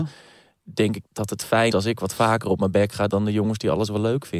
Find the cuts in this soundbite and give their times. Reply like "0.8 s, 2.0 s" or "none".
1.1 s, 1.7 s, 3.1 s

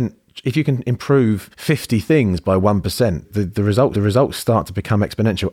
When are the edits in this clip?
1.5 s, 3.2 s, 3.9 s

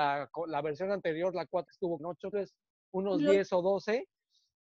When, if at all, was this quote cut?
1.7 s, 2.0 s, 2.3 s

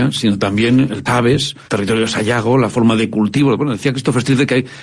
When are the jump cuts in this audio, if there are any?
1.1 s, 1.7 s

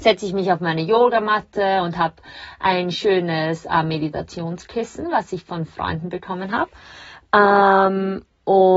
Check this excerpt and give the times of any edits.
none

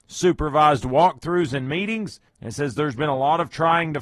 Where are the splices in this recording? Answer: 2.3 s

